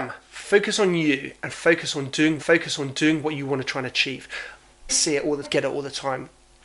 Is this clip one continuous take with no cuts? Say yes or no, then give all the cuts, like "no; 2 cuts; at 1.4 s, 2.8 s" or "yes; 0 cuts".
no; 3 cuts; at 2.4 s, 4.9 s, 5.4 s